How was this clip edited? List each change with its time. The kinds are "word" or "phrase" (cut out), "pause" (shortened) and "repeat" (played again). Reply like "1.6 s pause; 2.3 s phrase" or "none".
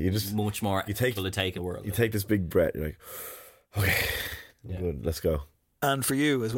1.1 s word; 1.6 s word; 2.5 s word; 4.5 s word